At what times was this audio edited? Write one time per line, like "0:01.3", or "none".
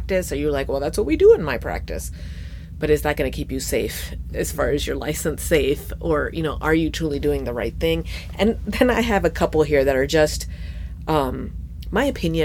none

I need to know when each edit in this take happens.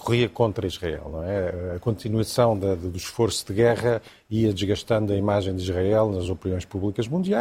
none

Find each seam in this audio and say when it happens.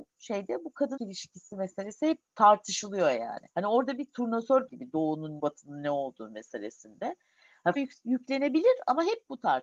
0:01.0
0:02.3
0:03.5
0:04.7
0:05.4
0:07.8

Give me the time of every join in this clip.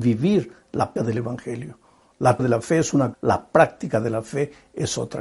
0:01.0
0:02.4
0:03.1

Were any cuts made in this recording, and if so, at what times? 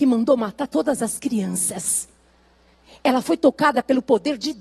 none

